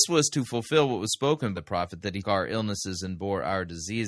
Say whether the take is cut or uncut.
cut